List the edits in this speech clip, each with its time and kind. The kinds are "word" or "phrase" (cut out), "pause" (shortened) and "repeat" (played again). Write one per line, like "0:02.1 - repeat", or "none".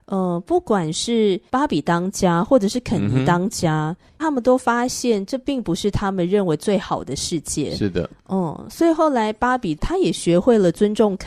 0:04.1 - pause